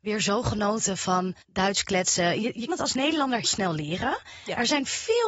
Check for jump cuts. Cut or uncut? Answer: cut